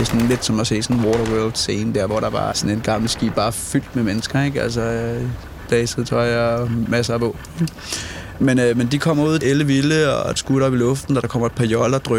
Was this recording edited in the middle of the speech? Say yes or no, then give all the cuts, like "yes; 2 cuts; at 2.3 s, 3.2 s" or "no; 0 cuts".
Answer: yes; 3 cuts; at 2.5 s, 9.4 s, 10.4 s